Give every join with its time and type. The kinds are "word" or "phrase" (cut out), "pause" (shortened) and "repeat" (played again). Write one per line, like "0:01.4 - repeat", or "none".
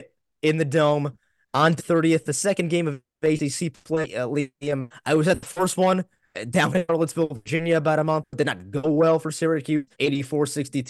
0:01.8 - word
0:09.9 - pause